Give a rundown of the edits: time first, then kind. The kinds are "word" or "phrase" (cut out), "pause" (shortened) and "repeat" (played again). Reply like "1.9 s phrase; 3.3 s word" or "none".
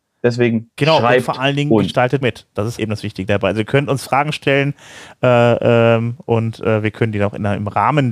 2.2 s phrase; 2.8 s word